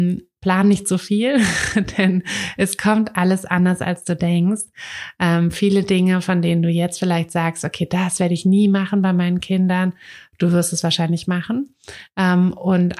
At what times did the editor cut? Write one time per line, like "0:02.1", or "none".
none